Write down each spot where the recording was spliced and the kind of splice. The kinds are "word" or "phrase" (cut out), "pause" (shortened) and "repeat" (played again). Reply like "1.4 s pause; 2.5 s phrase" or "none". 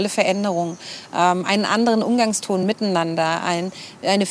none